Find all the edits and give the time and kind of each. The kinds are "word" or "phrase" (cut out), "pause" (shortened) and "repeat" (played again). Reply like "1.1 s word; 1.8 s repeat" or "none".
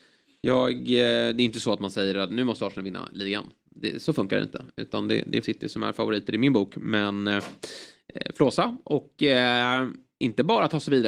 5.4 s word